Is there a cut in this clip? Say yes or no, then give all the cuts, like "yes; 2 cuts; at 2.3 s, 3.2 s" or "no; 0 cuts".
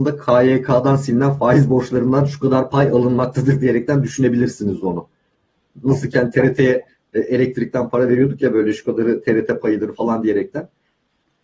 no; 0 cuts